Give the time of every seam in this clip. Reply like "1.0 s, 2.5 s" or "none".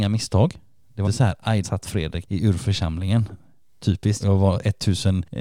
1.0 s, 1.6 s, 4.2 s